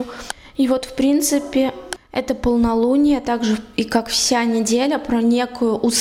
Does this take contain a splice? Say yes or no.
no